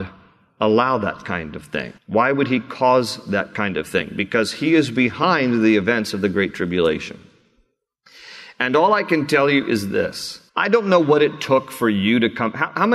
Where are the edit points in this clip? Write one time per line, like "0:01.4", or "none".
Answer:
0:02.0
0:10.5